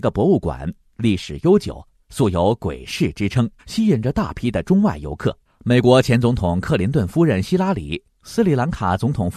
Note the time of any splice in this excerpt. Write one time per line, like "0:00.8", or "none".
0:03.6
0:05.4
0:08.1

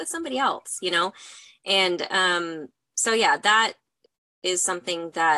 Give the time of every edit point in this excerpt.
none

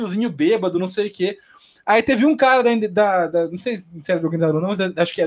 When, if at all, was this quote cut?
none

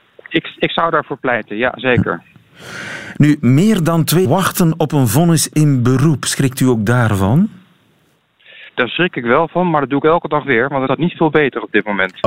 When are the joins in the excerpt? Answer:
0:04.2
0:08.7
0:10.9

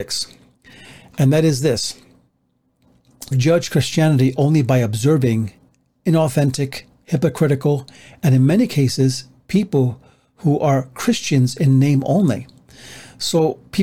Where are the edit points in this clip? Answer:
0:03.3

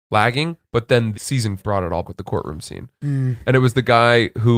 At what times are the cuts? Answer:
0:01.1
0:01.6
0:02.0

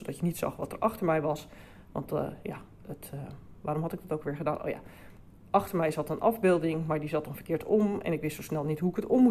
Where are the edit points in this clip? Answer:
none

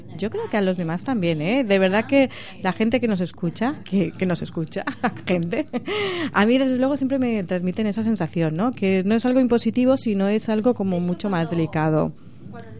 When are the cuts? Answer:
0:03.8

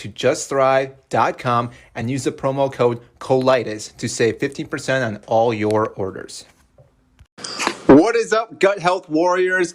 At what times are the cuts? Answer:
none

